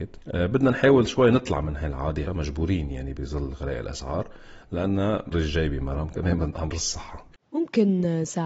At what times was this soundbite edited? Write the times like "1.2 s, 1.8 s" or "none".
2.3 s, 5.3 s, 6.7 s